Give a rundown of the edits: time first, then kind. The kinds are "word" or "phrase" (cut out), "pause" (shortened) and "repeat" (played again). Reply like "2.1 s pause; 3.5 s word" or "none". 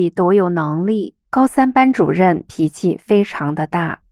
1.3 s pause

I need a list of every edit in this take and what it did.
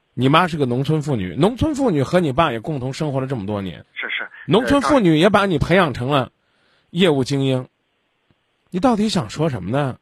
3.8 s pause

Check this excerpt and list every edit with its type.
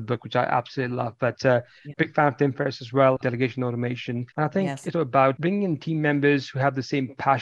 1.9 s phrase; 3.2 s phrase; 4.3 s pause; 4.9 s word

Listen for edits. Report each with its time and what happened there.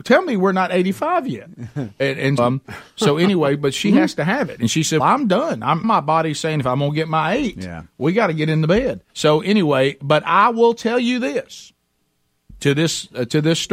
2.4 s word; 5.0 s word; 5.8 s word; 9.1 s pause

